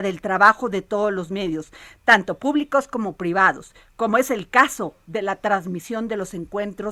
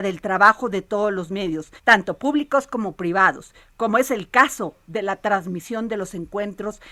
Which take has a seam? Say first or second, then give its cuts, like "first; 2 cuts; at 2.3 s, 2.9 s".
second; 1 cut; at 1.8 s